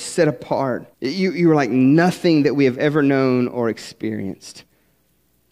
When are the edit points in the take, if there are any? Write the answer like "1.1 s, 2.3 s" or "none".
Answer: 0.9 s